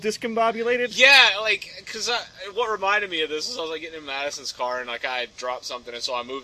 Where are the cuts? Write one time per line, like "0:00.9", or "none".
none